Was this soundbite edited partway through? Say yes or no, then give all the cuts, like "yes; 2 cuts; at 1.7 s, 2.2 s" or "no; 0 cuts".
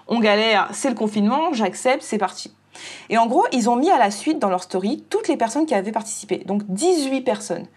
no; 0 cuts